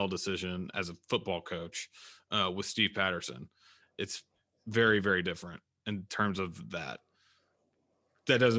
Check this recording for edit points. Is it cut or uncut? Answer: uncut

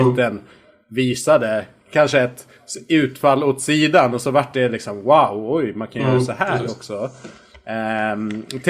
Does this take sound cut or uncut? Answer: uncut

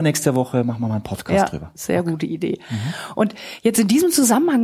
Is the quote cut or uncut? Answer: uncut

